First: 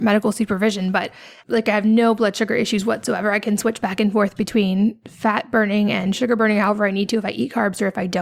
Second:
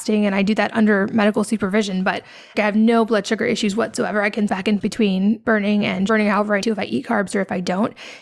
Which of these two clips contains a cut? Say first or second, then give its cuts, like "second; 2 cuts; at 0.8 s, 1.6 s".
second; 6 cuts; at 2.5 s, 4.5 s, 4.8 s, 5.4 s, 6.1 s, 6.6 s